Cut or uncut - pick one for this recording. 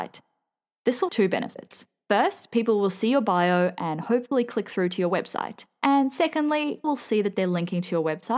cut